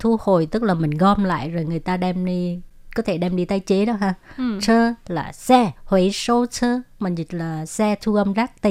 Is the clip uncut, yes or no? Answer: no